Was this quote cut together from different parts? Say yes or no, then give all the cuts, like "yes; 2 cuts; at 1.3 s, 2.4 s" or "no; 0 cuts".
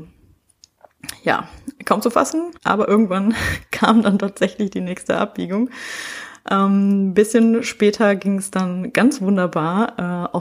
yes; 1 cut; at 2.5 s